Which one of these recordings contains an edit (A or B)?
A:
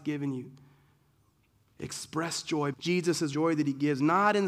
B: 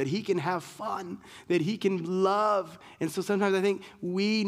A